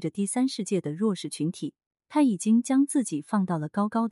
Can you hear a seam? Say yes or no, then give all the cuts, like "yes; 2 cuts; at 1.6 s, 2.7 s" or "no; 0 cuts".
no; 0 cuts